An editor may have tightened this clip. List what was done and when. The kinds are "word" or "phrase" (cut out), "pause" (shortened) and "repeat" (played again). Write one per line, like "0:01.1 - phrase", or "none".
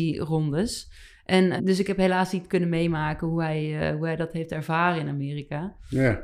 0:01.6 - word